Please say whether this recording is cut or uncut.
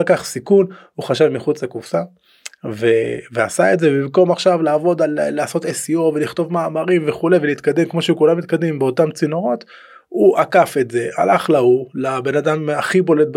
uncut